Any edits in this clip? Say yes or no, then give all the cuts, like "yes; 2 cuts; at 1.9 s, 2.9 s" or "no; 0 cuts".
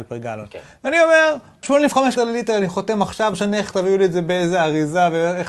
yes; 3 cuts; at 1.6 s, 2.2 s, 3.3 s